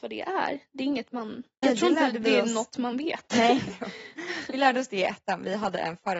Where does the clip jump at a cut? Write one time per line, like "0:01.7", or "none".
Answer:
0:01.6